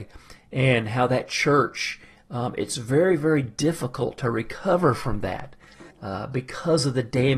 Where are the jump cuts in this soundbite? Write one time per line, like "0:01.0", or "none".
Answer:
0:05.9

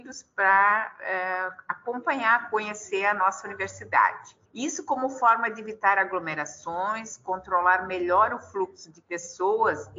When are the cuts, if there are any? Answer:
0:04.4

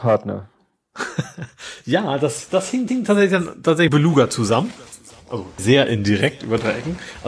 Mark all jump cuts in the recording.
0:02.9
0:03.9
0:05.6

